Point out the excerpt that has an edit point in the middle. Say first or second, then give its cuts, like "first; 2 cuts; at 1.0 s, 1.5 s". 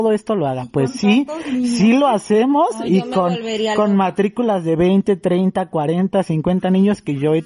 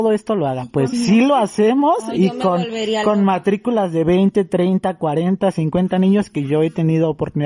second; 1 cut; at 0.9 s